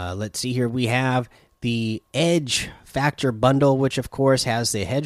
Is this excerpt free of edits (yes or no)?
yes